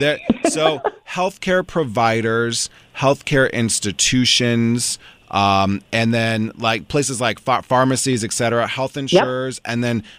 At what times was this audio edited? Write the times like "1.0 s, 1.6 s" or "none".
none